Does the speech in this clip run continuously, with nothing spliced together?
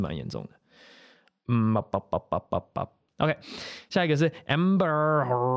yes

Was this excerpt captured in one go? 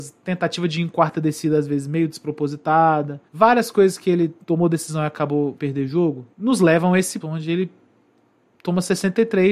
no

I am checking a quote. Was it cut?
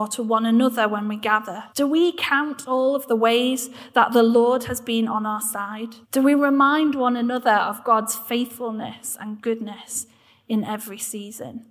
yes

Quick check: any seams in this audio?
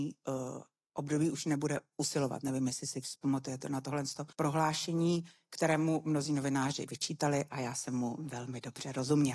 yes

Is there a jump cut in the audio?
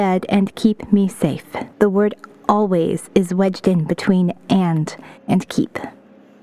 yes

